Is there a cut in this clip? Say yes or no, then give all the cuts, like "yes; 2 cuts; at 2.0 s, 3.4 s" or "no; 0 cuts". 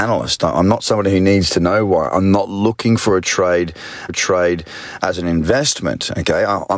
yes; 1 cut; at 4.1 s